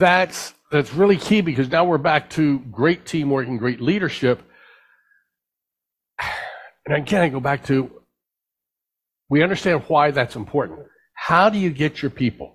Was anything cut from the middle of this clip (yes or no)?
no